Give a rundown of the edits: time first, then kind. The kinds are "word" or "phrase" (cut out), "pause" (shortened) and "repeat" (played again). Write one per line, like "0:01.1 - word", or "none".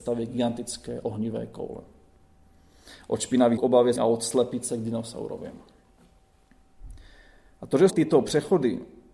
0:03.6 - word
0:04.0 - word
0:07.9 - word

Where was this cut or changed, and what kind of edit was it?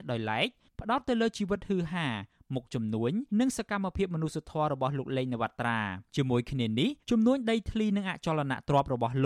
0:03.3 - pause
0:06.1 - pause
0:07.0 - pause

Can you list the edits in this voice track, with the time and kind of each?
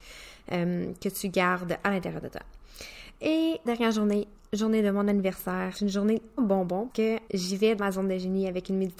0:03.7 - word
0:05.7 - word
0:06.4 - word
0:06.9 - word
0:07.3 - word
0:07.8 - word

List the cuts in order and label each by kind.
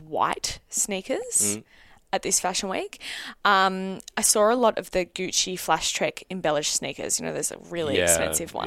none

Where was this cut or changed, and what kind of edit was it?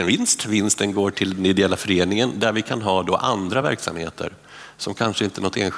none

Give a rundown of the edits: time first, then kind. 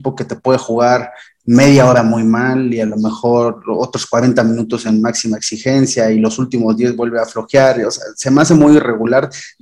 none

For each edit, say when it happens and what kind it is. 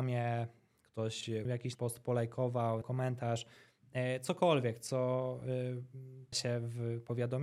0:01.4 - word
0:01.7 - word
0:02.8 - word
0:06.3 - word

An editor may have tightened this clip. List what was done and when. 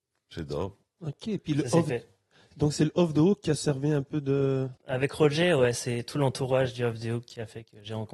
0:04.8 - pause

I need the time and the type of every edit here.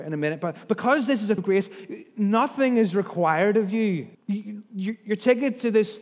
0:01.4 - word
0:04.1 - pause

